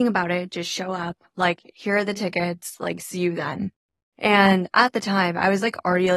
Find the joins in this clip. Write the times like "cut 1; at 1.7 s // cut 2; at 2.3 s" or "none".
none